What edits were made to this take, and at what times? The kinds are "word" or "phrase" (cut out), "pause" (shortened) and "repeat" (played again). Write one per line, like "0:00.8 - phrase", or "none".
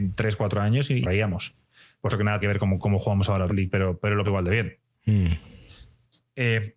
0:01.0 - word
0:02.1 - word
0:02.4 - word
0:03.5 - word
0:04.2 - word